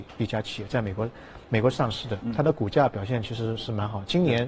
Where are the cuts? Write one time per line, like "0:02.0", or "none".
0:01.4